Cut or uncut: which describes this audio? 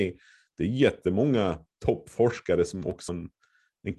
cut